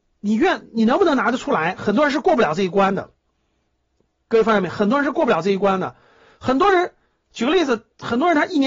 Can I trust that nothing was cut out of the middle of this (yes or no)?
yes